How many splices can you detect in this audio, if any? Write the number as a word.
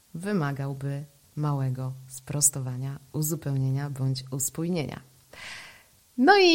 zero